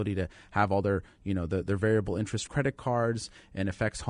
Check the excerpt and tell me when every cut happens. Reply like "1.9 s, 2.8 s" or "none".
2.5 s